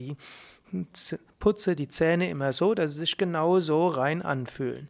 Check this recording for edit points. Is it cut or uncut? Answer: uncut